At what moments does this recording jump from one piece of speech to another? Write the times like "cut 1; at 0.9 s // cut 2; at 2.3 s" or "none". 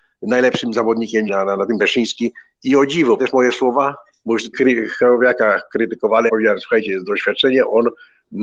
cut 1; at 1.3 s // cut 2; at 1.8 s // cut 3; at 3.2 s // cut 4; at 4.5 s // cut 5; at 6.3 s

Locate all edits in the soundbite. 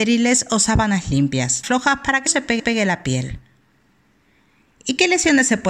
cut 1; at 1.6 s // cut 2; at 2.3 s // cut 3; at 2.6 s

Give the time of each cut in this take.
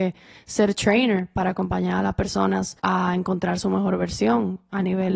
cut 1; at 2.8 s

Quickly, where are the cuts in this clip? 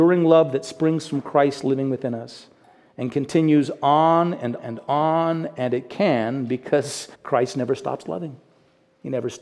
cut 1; at 4.6 s // cut 2; at 7.1 s

